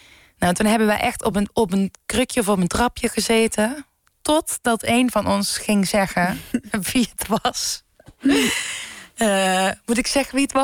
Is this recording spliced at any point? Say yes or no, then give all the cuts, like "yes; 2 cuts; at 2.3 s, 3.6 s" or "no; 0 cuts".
no; 0 cuts